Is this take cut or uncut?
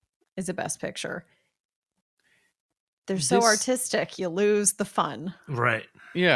uncut